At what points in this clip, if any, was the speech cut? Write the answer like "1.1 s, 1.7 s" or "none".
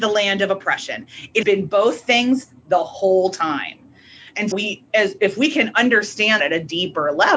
1.4 s, 4.5 s, 6.4 s